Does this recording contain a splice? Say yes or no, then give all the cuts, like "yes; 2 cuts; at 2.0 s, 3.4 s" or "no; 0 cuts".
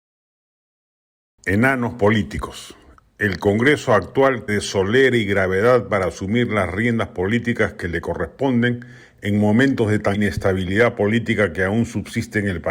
yes; 2 cuts; at 4.5 s, 10.1 s